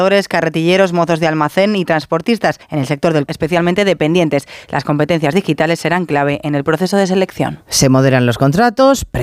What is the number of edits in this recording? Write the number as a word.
two